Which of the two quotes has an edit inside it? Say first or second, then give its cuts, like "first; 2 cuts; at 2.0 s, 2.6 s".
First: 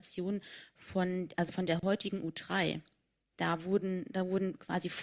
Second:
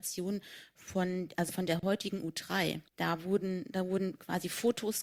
second; 1 cut; at 2.9 s